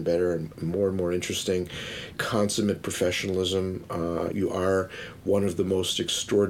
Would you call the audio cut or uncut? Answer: cut